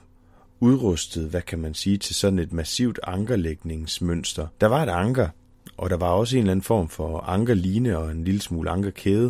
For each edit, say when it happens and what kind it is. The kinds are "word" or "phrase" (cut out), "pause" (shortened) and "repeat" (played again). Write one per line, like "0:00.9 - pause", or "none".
0:04.5 - pause